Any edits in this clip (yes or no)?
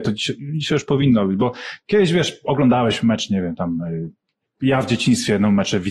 no